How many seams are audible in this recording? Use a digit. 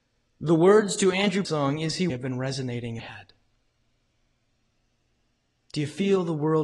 3